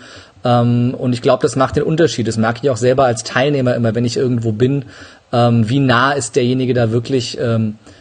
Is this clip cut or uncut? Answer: uncut